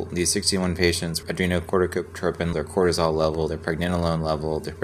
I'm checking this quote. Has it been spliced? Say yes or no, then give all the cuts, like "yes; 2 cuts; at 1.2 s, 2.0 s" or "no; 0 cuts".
yes; 2 cuts; at 1.2 s, 2.5 s